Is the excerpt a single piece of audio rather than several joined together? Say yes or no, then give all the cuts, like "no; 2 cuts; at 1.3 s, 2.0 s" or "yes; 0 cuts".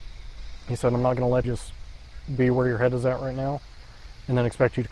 no; 1 cut; at 1.4 s